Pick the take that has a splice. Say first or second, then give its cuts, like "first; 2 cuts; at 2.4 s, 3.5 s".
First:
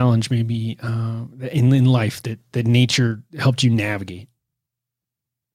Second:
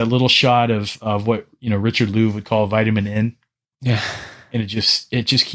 first; 1 cut; at 3.3 s